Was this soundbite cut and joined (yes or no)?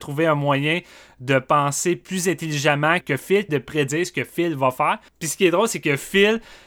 yes